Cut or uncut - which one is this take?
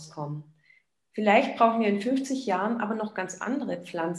uncut